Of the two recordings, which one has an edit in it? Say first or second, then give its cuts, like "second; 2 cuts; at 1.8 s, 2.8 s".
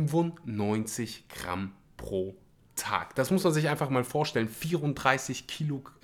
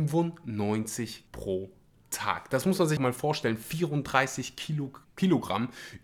second; 3 cuts; at 1.3 s, 3.0 s, 5.0 s